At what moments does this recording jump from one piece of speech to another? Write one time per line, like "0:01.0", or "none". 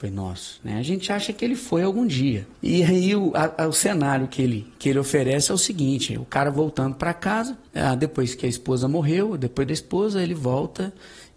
0:02.6
0:09.7

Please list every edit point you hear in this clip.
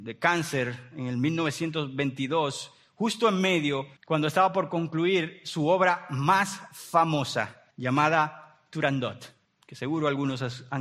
0:04.0
0:07.7
0:09.4

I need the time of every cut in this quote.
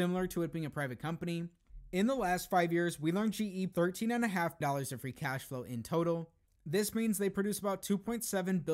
0:03.7
0:04.6

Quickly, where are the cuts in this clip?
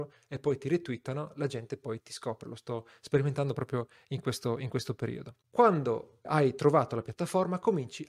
0:06.2

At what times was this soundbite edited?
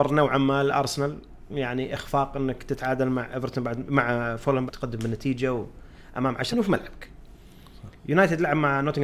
0:04.7
0:06.5
0:08.0

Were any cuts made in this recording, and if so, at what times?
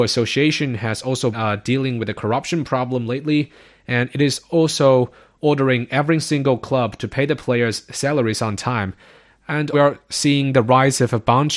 0:01.3
0:09.7

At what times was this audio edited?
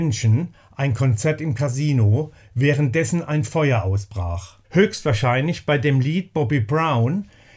0:04.6

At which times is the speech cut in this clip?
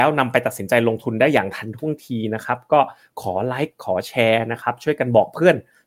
none

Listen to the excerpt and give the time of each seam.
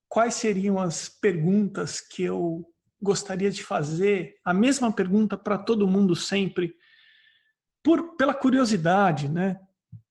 none

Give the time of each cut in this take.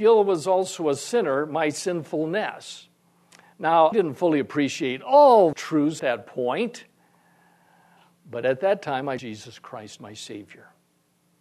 0:03.9
0:05.5
0:06.0
0:09.2
0:10.0

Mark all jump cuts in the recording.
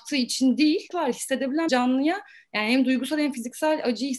0:00.9
0:01.7

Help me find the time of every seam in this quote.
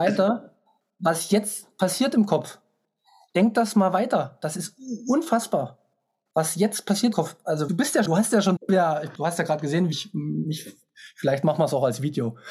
0:07.1
0:07.7
0:08.1
0:08.6
0:09.1
0:09.9

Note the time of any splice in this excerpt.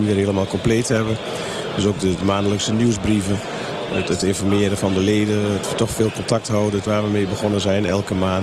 0:02.2
0:04.8
0:05.6
0:06.9

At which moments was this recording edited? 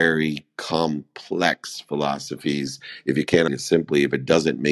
0:03.5

